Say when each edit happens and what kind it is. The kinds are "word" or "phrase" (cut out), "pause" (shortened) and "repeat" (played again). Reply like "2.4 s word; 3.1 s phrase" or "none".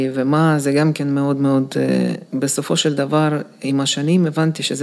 2.3 s pause